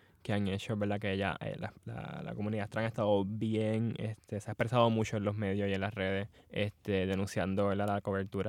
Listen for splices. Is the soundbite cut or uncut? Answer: cut